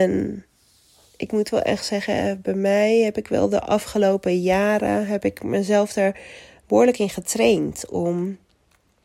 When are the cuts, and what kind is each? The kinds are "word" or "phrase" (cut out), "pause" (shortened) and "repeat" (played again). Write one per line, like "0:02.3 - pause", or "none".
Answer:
none